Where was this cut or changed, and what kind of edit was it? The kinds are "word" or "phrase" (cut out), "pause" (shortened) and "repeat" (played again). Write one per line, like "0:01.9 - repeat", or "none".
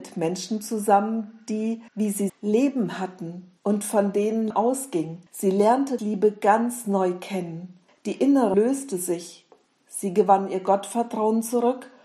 0:01.9 - pause
0:02.3 - word
0:03.6 - pause
0:04.5 - word
0:05.3 - pause
0:06.0 - word
0:07.9 - pause
0:08.5 - word